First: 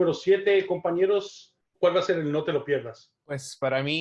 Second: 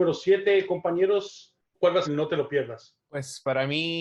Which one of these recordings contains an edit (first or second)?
second